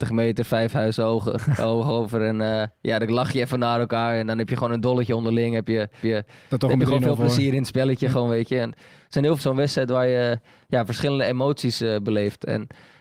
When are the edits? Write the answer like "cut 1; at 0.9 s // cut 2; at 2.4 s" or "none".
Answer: cut 1; at 6.0 s // cut 2; at 9.4 s

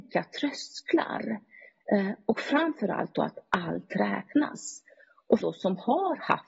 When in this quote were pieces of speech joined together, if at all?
cut 1; at 5.4 s

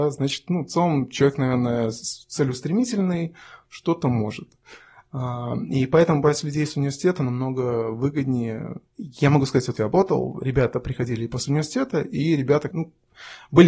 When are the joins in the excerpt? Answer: cut 1; at 8.9 s // cut 2; at 9.8 s // cut 3; at 12.7 s

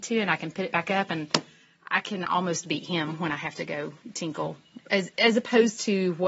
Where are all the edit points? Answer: none

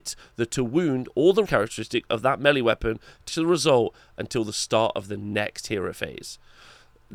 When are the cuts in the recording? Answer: cut 1; at 1.5 s // cut 2; at 3.3 s

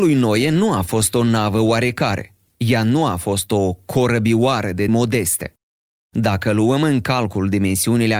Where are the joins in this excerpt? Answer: cut 1; at 4.9 s

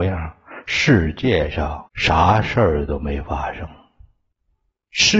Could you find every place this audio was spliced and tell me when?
cut 1; at 1.9 s

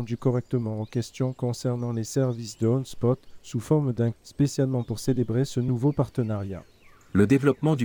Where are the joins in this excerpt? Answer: cut 1; at 4.1 s // cut 2; at 4.8 s

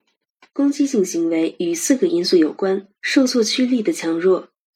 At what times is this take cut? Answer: cut 1; at 2.9 s

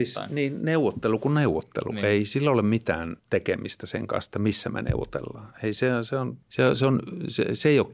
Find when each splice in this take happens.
cut 1; at 3.2 s // cut 2; at 6.4 s

